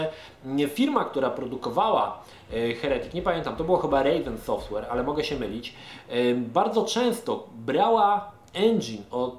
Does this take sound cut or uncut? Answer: uncut